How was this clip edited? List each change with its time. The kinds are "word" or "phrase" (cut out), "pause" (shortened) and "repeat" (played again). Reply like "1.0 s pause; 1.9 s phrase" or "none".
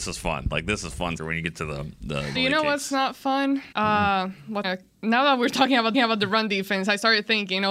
1.2 s word; 2.3 s word; 3.7 s pause; 4.6 s word; 5.9 s repeat